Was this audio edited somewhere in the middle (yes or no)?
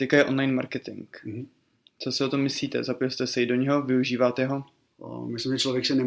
no